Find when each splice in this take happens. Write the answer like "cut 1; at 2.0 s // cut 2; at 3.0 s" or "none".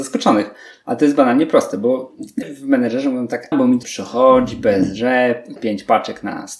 cut 1; at 2.4 s // cut 2; at 3.5 s // cut 3; at 3.8 s // cut 4; at 5.6 s